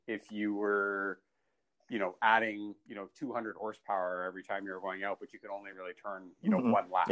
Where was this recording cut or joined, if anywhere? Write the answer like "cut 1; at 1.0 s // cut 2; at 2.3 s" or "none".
none